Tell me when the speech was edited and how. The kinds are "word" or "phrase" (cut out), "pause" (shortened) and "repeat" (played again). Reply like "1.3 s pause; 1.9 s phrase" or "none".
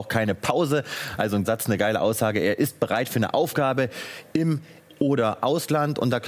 1.4 s word; 4.9 s word